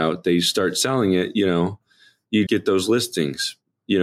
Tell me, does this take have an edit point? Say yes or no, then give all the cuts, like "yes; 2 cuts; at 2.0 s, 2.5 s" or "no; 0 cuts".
yes; 1 cut; at 2.5 s